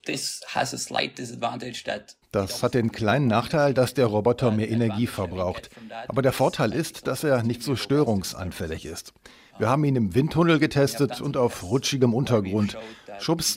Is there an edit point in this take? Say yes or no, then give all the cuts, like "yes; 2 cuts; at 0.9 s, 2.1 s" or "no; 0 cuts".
no; 0 cuts